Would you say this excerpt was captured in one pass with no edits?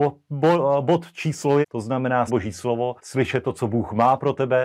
no; 3 cuts; at 1.6 s, 2.3 s, 3.0 s

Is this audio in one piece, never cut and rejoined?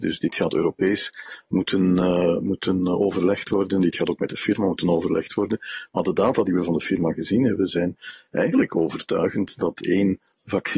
yes; 0 cuts

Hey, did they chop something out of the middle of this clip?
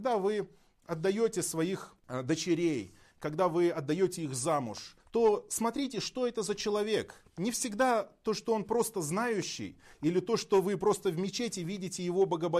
yes; 2 cuts; at 2.0 s, 5.0 s

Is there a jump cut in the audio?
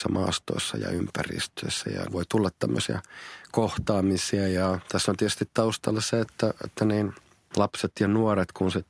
no; 0 cuts

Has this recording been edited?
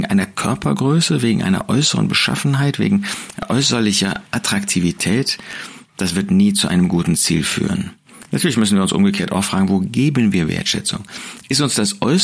no; 0 cuts

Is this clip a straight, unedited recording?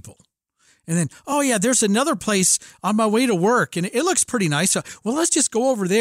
yes; 0 cuts

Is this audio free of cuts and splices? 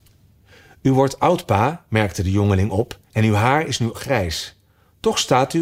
no; 2 cuts; at 3.1 s, 3.9 s

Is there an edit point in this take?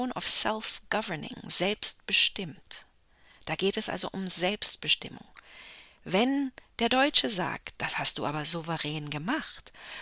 no; 0 cuts

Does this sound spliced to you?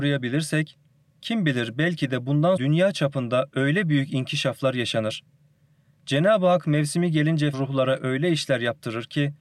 yes; 2 cuts; at 2.6 s, 7.5 s

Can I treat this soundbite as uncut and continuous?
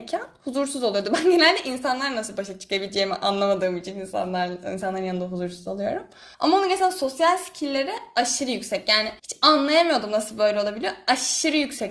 no; 2 cuts; at 6.3 s, 9.2 s

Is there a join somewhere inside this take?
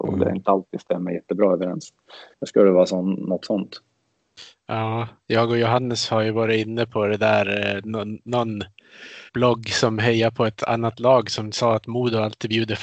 yes; 3 cuts; at 2.3 s, 5.2 s, 9.3 s

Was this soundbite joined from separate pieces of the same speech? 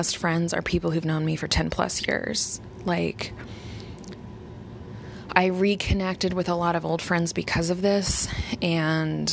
no; 0 cuts

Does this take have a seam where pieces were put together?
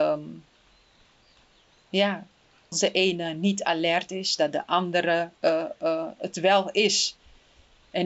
yes; 2 cuts; at 2.7 s, 5.3 s

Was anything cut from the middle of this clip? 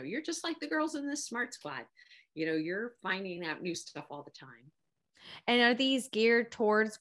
no; 0 cuts

